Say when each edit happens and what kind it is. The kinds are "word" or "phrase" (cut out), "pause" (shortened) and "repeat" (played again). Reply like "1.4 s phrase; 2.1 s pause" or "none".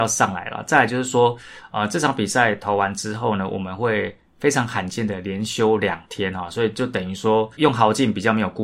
7.5 s pause